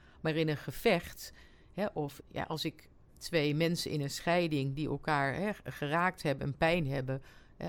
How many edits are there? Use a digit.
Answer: 1